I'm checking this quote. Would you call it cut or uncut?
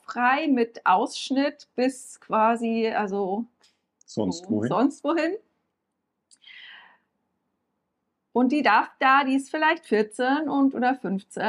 uncut